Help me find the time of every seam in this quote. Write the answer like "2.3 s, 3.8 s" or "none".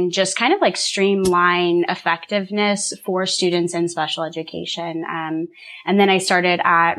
none